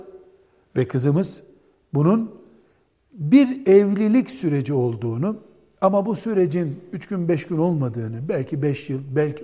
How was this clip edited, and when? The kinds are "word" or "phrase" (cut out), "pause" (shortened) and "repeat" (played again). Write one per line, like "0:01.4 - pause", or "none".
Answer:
none

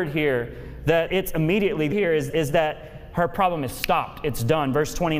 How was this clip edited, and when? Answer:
0:01.1 - word
0:01.9 - word
0:02.3 - word

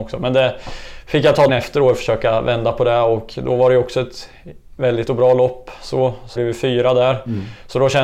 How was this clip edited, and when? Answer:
0:01.5 - word
0:05.1 - word
0:06.4 - word

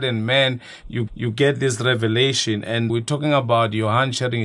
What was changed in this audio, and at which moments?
0:01.1 - repeat
0:02.9 - word

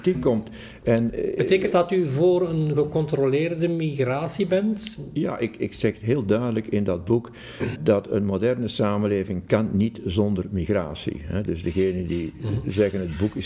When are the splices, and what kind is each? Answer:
0:01.7 - word
0:07.8 - word

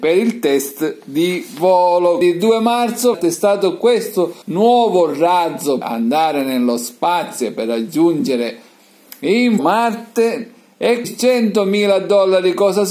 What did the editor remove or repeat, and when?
0:02.2 - word
0:03.1 - word
0:04.4 - pause
0:05.8 - word
0:09.6 - word
0:11.0 - word

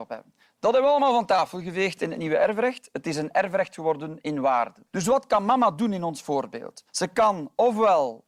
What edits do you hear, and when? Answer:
0:04.9 - pause
0:06.9 - pause

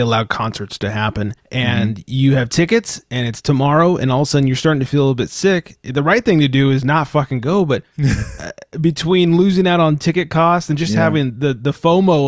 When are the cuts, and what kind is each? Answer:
0:01.4 - pause

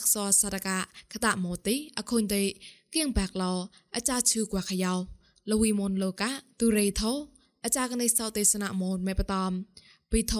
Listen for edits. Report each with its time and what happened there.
none

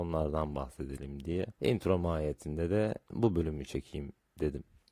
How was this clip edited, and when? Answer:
0:01.5 - pause

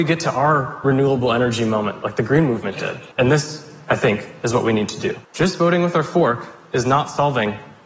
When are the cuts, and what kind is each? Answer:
0:03.1 - pause
0:05.2 - pause

